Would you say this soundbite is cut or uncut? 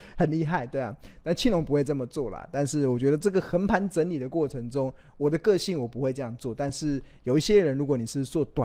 uncut